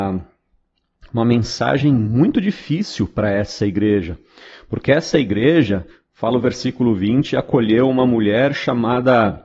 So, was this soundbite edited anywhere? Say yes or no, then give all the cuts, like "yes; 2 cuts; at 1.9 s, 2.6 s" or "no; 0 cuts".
no; 0 cuts